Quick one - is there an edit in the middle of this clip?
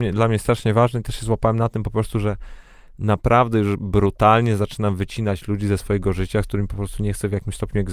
no; 0 cuts

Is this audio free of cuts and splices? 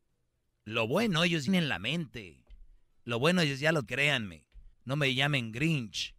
no; 3 cuts; at 1.5 s, 3.8 s, 4.7 s

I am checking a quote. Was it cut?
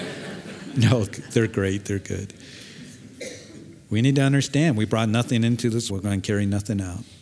yes; 3 cuts; at 1.1 s, 3.8 s, 5.9 s

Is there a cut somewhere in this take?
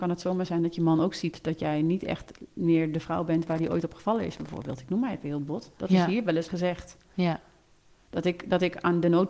yes; 1 cut; at 6.5 s

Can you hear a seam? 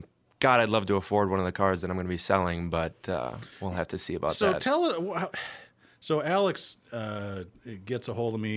no; 0 cuts

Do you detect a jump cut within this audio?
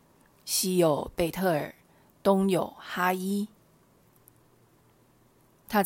no; 0 cuts

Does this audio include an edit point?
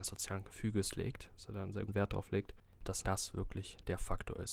yes; 2 cuts; at 1.9 s, 3.0 s

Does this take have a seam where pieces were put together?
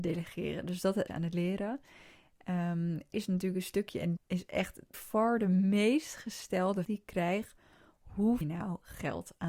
yes; 6 cuts; at 1.1 s, 3.1 s, 4.2 s, 4.9 s, 6.8 s, 8.4 s

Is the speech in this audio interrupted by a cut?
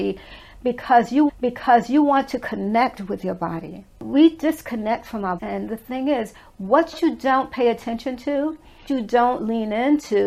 yes; 3 cuts; at 1.3 s, 5.4 s, 8.9 s

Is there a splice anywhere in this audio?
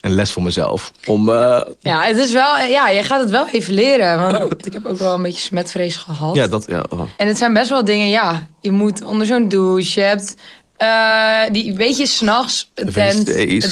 yes; 2 cuts; at 1.0 s, 7.1 s

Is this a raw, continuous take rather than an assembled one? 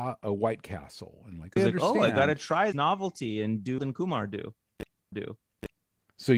no; 4 cuts; at 1.6 s, 2.7 s, 3.8 s, 5.1 s

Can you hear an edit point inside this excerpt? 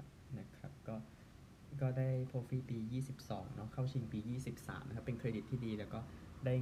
yes; 1 cut; at 2.3 s

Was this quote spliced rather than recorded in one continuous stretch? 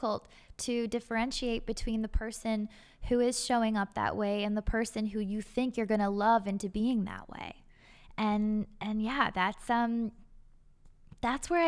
no; 0 cuts

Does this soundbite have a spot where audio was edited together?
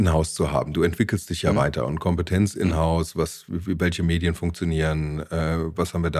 no; 0 cuts

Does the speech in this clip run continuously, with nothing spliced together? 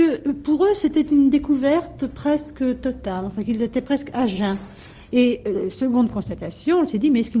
yes; 0 cuts

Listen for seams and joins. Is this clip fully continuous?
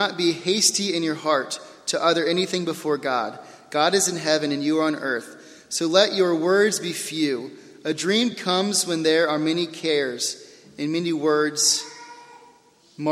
yes; 0 cuts

